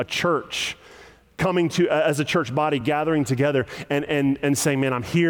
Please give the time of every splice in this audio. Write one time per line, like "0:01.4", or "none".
none